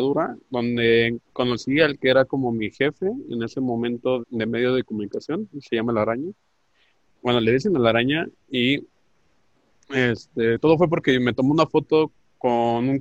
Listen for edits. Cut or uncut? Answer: cut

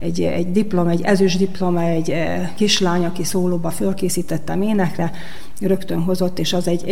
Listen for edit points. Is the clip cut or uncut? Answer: uncut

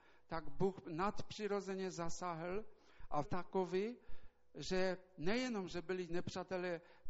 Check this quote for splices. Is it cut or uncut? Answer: cut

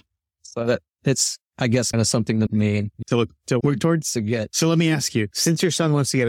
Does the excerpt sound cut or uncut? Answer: cut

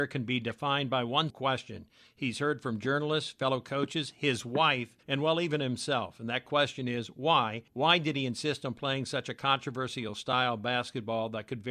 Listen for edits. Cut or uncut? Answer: cut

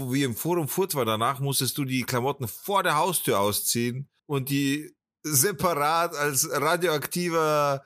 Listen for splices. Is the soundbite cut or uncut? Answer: cut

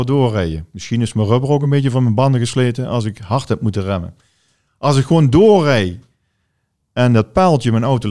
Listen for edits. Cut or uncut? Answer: uncut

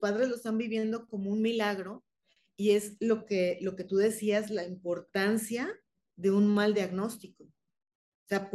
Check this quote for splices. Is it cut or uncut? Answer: uncut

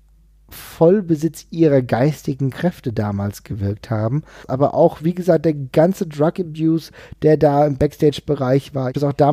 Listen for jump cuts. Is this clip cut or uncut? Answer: uncut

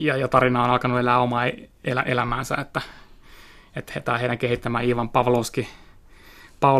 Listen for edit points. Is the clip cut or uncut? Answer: uncut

